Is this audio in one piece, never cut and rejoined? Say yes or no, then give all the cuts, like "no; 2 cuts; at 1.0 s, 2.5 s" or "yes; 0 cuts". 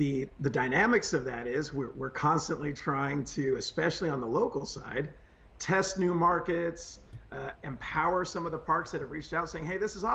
yes; 0 cuts